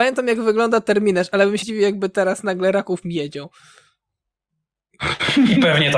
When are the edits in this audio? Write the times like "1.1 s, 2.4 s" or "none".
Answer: 1.6 s, 3.0 s